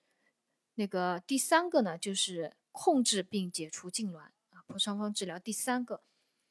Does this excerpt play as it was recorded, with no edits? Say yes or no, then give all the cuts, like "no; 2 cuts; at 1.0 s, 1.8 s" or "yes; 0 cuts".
no; 1 cut; at 2.6 s